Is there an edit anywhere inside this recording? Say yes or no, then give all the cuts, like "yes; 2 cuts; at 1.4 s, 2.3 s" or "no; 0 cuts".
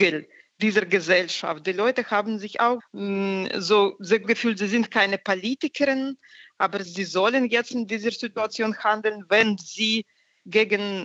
yes; 3 cuts; at 2.8 s, 4.2 s, 6.9 s